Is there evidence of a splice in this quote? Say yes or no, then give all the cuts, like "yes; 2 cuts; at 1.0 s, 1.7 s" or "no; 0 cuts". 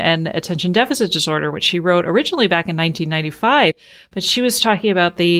no; 0 cuts